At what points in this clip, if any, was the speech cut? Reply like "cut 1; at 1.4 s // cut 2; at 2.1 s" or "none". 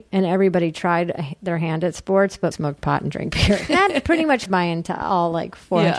cut 1; at 2.5 s // cut 2; at 3.7 s // cut 3; at 4.5 s